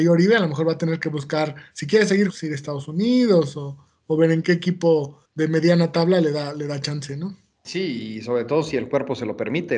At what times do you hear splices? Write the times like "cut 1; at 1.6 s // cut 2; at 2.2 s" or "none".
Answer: cut 1; at 2.3 s // cut 2; at 4.4 s // cut 3; at 5.3 s